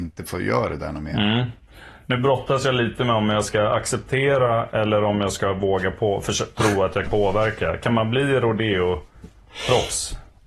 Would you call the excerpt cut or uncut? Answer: cut